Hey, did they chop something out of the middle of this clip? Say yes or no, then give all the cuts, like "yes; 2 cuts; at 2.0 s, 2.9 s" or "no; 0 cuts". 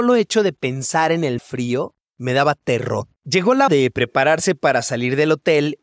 yes; 3 cuts; at 1.4 s, 3.2 s, 3.7 s